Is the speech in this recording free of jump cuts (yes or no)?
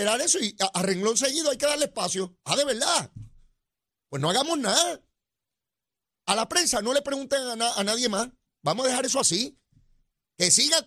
yes